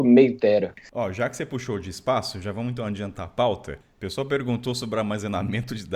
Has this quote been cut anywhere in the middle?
no; 0 cuts

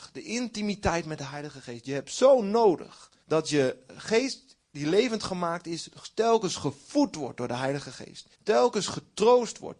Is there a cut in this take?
yes; 2 cuts; at 3.2 s, 8.3 s

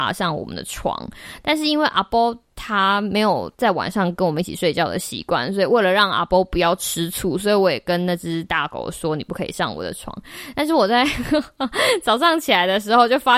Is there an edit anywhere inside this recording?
yes; 1 cut; at 3.5 s

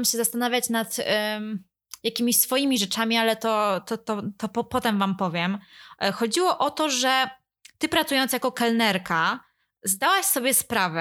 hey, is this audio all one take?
yes; 0 cuts

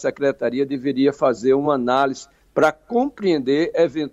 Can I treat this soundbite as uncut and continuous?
yes; 0 cuts

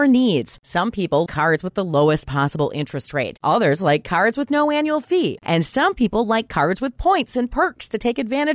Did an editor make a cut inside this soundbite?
yes; 1 cut; at 1.3 s

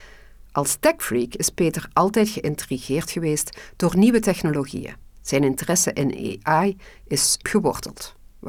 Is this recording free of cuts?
no; 2 cuts; at 5.0 s, 7.4 s

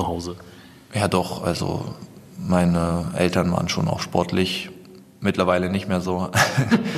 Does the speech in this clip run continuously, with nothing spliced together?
yes; 0 cuts

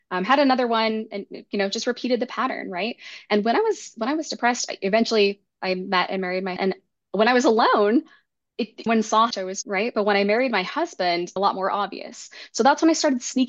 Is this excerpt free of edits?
no; 5 cuts; at 6.6 s, 8.9 s, 9.3 s, 9.6 s, 11.4 s

